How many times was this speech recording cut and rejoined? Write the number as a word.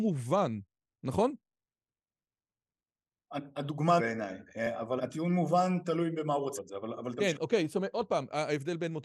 three